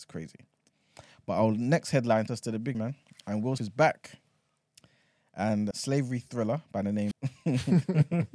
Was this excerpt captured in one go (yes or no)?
no